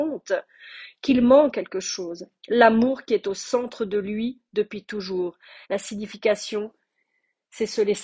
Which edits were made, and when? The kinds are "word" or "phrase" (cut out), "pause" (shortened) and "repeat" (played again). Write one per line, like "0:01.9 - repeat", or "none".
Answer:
0:01.5 - word
0:05.6 - pause